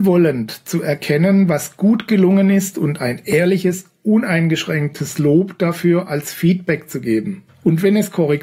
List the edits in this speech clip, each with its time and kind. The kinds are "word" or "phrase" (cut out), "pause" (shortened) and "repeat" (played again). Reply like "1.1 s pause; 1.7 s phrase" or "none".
7.5 s pause